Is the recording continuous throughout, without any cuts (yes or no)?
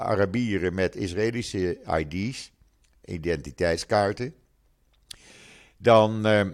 yes